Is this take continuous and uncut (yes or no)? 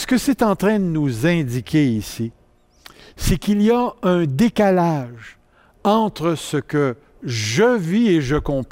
yes